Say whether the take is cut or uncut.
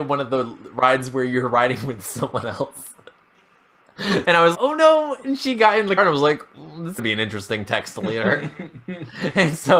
cut